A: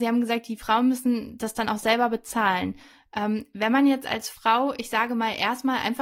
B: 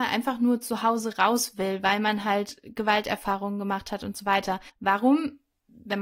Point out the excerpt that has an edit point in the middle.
B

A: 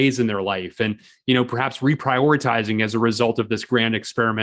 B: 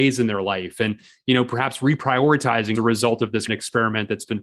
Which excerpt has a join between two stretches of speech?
B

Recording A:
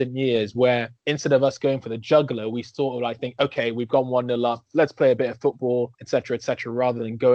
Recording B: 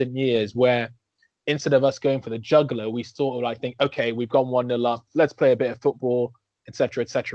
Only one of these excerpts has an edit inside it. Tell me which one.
A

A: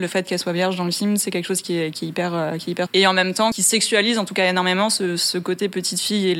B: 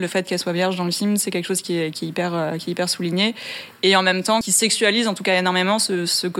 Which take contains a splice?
A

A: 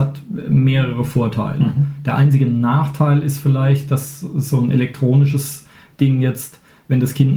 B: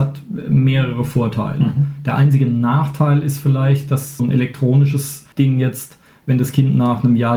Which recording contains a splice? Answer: B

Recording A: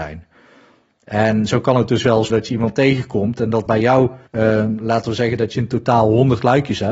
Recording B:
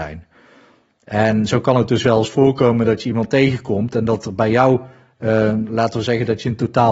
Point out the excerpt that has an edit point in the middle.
A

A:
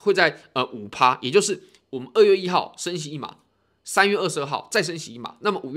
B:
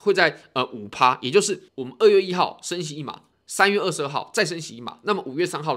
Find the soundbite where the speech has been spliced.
B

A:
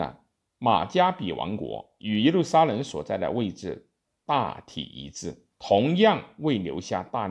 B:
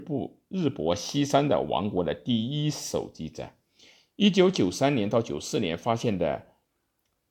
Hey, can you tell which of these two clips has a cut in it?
A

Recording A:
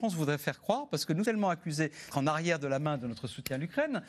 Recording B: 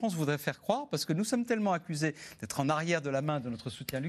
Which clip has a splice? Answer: A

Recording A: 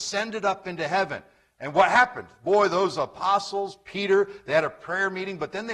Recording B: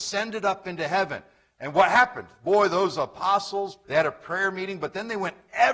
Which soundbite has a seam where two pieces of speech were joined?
B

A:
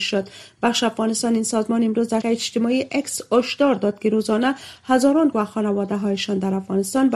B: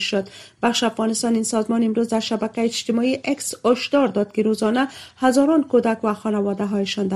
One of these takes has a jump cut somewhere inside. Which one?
A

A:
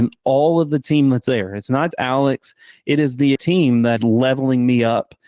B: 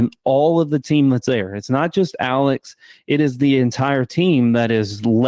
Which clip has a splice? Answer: A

